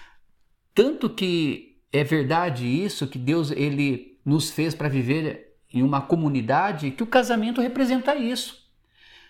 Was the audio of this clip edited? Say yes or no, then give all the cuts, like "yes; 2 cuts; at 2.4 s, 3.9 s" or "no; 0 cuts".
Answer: no; 0 cuts